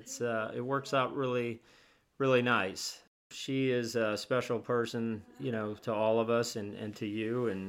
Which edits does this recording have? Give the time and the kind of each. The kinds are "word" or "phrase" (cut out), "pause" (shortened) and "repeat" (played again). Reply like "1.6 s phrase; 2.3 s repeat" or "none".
3.2 s pause